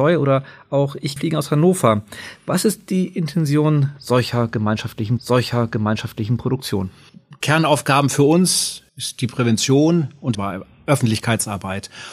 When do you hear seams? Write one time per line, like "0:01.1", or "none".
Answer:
0:01.2
0:05.2
0:08.9
0:10.3